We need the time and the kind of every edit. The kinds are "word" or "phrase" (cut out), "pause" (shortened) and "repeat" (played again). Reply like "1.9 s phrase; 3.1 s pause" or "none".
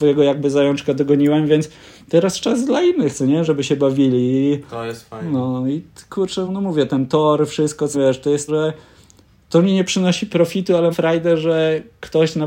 6.5 s word; 7.9 s word; 8.5 s word; 10.9 s word